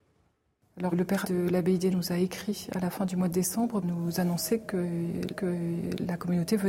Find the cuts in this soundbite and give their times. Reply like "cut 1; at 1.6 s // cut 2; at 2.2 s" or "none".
cut 1; at 0.9 s // cut 2; at 1.2 s // cut 3; at 1.9 s // cut 4; at 3.8 s // cut 5; at 5.3 s